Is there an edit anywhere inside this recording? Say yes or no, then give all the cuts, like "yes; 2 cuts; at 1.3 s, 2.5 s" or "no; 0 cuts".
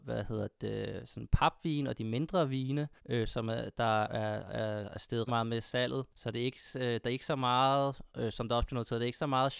yes; 4 cuts; at 3.0 s, 4.0 s, 5.3 s, 6.1 s